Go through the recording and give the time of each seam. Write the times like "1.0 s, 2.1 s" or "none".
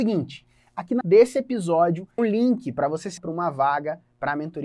1.0 s, 2.2 s, 3.2 s